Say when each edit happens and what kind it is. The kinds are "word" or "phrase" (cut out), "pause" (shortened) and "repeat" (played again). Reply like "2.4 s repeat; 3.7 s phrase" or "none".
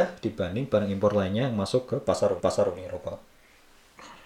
2.4 s repeat